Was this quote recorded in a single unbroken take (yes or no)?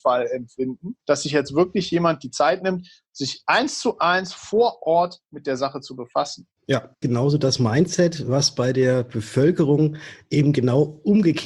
no